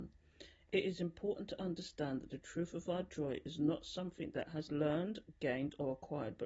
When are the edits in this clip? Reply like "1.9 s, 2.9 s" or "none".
4.7 s